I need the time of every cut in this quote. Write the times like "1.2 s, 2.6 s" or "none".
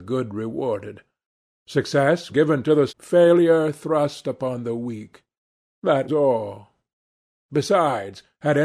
2.3 s, 2.9 s, 6.1 s

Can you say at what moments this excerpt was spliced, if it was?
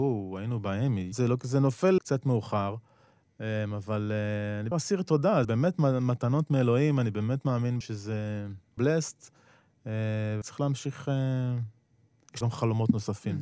1.1 s, 2.0 s, 4.7 s, 5.4 s, 7.8 s, 8.8 s, 10.4 s, 12.4 s

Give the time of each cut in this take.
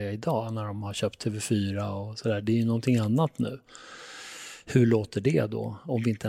none

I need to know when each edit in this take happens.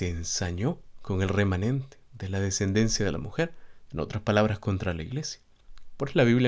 none

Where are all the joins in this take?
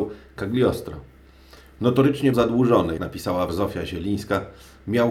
2.3 s, 3.0 s, 3.5 s

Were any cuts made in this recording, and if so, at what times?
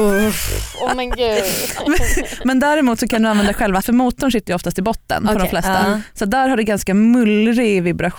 3.8 s

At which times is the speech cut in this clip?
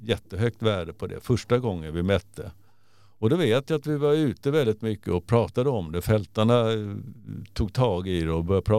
none

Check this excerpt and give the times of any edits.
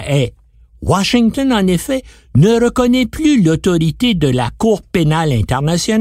none

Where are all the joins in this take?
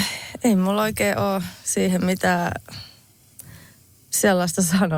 none

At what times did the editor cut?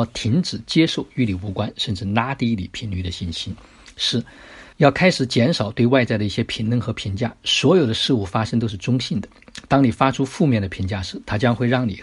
4.7 s

